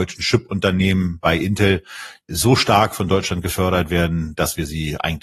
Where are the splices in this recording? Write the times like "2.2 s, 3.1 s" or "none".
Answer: 2.2 s